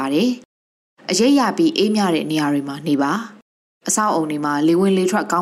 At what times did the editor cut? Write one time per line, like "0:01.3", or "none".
none